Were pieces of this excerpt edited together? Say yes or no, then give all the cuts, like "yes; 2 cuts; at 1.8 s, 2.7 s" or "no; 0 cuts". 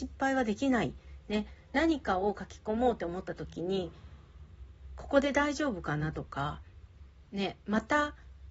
no; 0 cuts